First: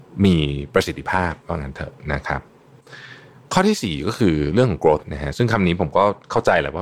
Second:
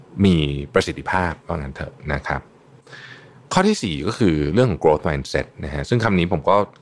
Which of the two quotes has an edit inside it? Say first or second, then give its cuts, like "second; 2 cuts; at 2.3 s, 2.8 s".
first; 1 cut; at 5.0 s